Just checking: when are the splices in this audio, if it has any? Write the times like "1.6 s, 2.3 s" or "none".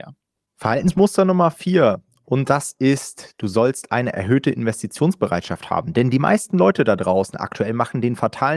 none